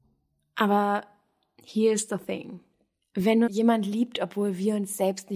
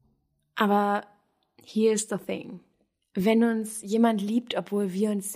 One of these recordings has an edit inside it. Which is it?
first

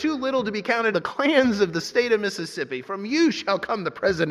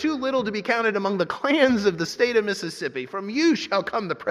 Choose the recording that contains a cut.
first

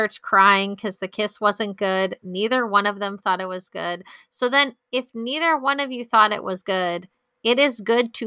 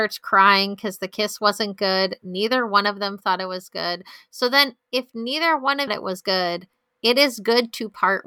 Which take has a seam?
second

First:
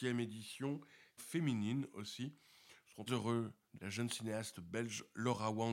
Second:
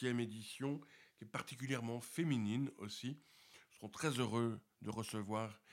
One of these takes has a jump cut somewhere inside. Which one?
first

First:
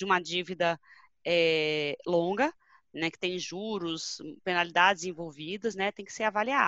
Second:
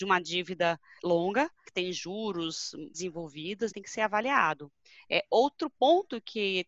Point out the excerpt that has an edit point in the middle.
second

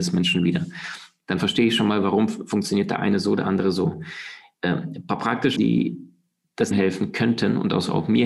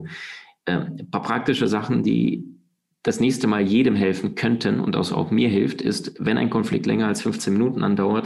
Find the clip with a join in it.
first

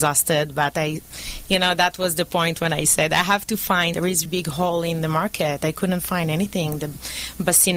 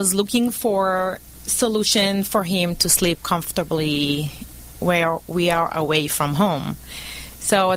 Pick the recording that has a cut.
first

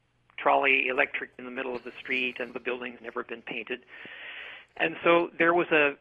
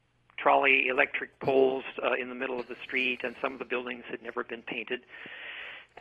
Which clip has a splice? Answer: first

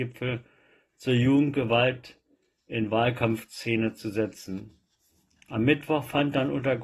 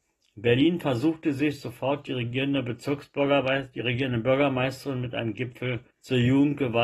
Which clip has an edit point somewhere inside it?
second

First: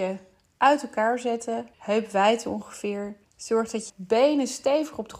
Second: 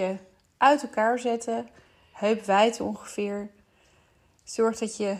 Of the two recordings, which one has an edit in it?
first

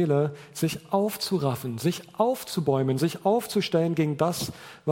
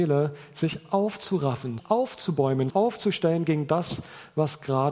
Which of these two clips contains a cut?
second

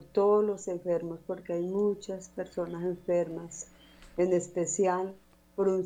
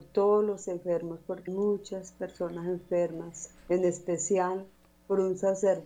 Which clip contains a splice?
second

